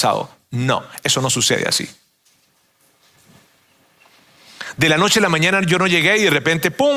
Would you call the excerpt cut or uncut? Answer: uncut